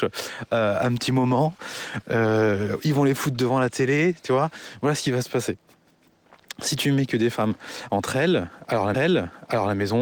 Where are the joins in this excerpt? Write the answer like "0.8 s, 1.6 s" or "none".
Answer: 8.9 s